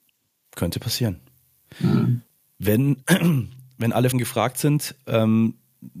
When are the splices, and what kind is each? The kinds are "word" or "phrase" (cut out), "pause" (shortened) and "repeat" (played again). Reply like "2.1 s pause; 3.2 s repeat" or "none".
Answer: 4.1 s word